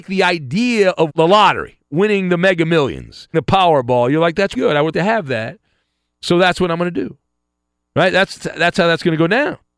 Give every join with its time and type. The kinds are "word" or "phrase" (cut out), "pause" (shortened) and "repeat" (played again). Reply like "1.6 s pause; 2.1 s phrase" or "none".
1.1 s word; 3.3 s word; 4.5 s word; 4.9 s word; 8.4 s word